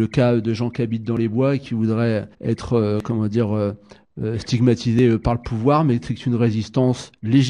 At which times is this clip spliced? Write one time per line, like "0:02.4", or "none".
0:02.3

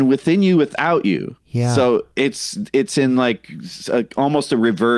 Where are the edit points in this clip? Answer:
0:01.4
0:02.1

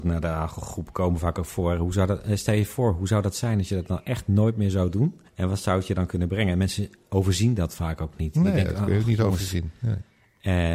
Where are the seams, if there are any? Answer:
0:05.3

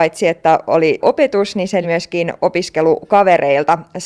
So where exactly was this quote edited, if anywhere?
0:01.0
0:01.8

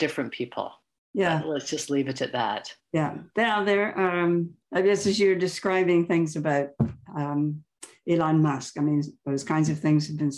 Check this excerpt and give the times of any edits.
0:04.6

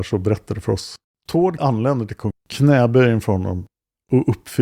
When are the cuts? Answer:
0:01.6
0:02.3

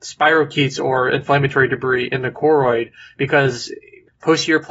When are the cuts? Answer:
none

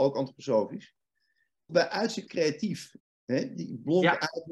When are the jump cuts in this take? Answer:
0:01.7
0:02.3
0:03.0

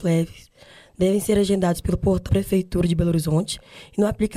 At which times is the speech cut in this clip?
0:02.3

